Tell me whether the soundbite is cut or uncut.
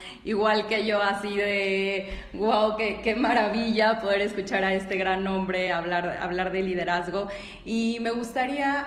uncut